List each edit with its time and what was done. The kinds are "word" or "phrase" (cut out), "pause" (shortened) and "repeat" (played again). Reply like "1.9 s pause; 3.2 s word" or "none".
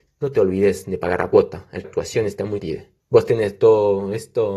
1.8 s phrase; 2.6 s word; 3.0 s pause